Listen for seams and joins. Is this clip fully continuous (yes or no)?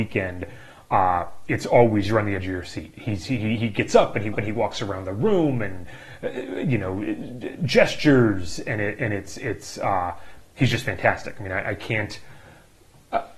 no